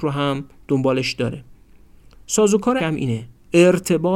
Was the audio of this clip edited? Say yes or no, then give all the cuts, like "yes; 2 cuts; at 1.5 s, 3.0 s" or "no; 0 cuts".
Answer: yes; 1 cut; at 2.8 s